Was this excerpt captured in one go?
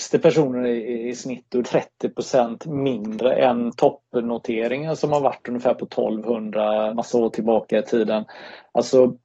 no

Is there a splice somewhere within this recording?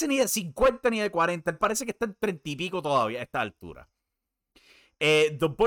no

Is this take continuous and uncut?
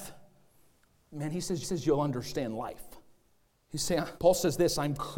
no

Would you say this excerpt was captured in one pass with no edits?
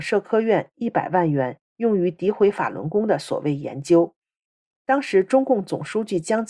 yes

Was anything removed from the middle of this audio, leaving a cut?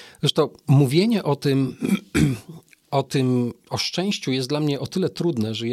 no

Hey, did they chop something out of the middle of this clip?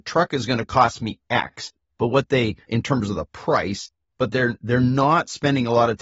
no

